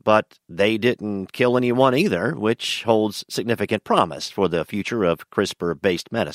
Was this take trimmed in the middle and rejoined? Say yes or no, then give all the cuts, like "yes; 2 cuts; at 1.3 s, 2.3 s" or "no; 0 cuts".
no; 0 cuts